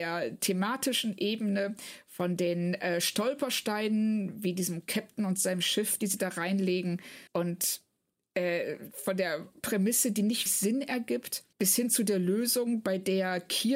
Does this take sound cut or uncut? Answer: cut